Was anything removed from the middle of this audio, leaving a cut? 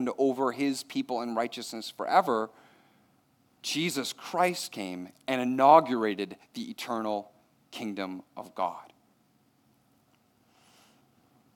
no; 0 cuts

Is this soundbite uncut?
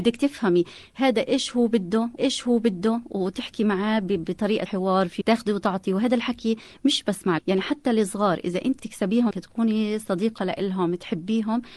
no; 6 cuts; at 2.2 s, 4.7 s, 5.2 s, 7.4 s, 8.8 s, 9.3 s

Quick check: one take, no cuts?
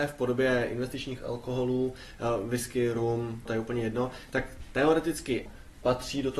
no; 2 cuts; at 3.5 s, 5.5 s

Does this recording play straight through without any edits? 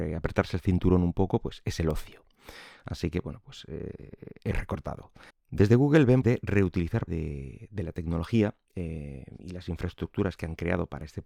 no; 5 cuts; at 4.5 s, 5.3 s, 6.2 s, 7.1 s, 8.6 s

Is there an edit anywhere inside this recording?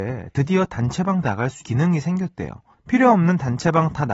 yes; 3 cuts; at 1.2 s, 1.6 s, 2.7 s

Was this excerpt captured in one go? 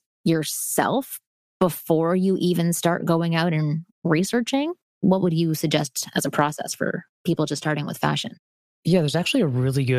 yes; 0 cuts

